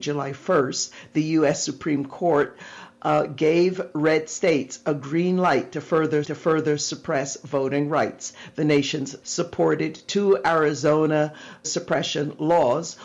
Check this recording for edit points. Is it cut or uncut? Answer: cut